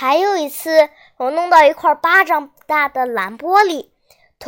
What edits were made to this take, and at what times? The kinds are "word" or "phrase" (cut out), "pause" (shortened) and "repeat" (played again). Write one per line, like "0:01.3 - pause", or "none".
none